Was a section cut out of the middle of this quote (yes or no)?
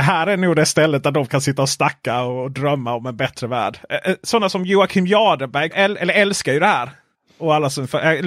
yes